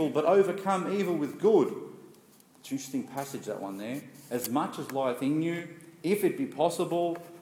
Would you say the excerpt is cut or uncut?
uncut